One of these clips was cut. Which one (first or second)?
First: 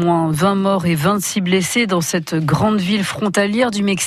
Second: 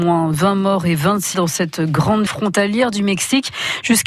second